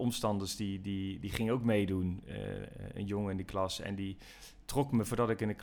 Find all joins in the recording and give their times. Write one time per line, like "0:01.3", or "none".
none